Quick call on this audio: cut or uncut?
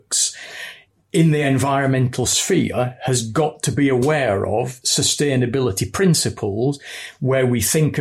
uncut